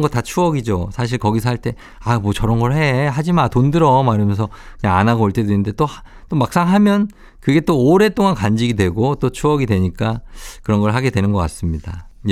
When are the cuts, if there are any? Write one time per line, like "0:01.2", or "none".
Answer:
none